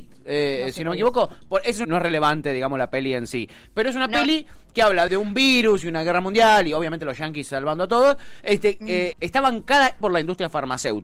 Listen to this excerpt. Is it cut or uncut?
cut